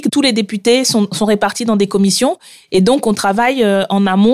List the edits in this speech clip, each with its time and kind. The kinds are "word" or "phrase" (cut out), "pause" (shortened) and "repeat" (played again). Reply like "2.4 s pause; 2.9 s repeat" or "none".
none